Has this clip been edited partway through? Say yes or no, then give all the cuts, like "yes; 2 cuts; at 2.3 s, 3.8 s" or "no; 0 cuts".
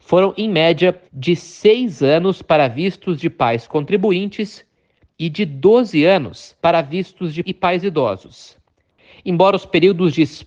yes; 3 cuts; at 1.0 s, 6.6 s, 7.4 s